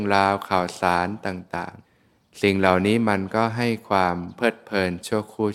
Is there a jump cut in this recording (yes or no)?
yes